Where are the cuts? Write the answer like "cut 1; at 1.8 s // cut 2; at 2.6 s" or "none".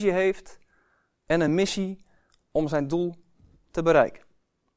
none